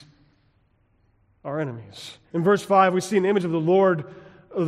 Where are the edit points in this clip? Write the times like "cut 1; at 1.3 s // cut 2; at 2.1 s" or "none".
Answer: cut 1; at 2.2 s